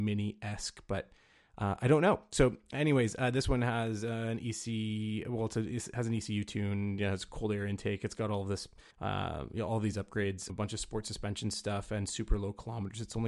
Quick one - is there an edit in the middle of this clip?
yes; 2 cuts; at 8.9 s, 10.5 s

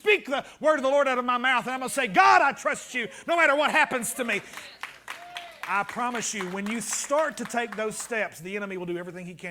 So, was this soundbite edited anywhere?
no; 0 cuts

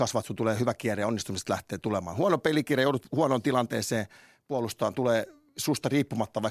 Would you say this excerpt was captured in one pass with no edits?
yes; 0 cuts

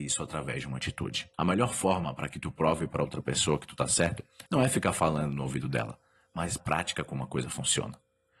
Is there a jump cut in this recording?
yes; 3 cuts; at 1.3 s, 4.4 s, 6.6 s

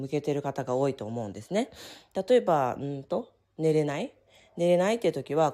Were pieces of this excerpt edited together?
no; 0 cuts

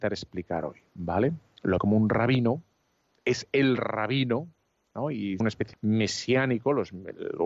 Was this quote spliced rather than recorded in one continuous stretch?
yes; 3 cuts; at 1.8 s, 5.4 s, 5.7 s

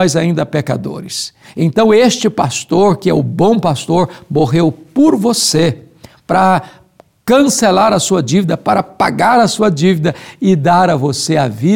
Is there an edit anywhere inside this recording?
no; 0 cuts

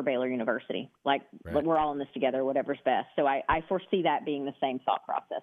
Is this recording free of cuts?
no; 1 cut; at 1.0 s

